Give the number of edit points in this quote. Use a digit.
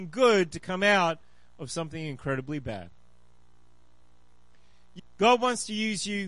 1